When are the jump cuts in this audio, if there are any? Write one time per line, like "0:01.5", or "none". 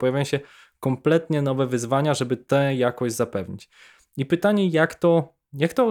none